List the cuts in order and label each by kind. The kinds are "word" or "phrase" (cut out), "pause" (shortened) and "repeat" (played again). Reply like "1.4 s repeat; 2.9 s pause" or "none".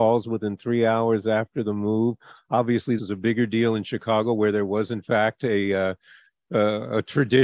3.0 s word